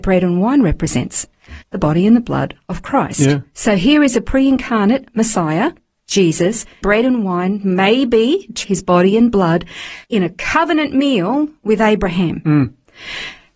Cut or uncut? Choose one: cut